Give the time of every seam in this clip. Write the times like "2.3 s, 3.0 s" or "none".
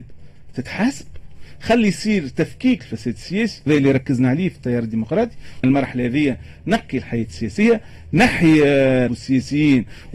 2.8 s, 3.7 s, 5.6 s, 9.1 s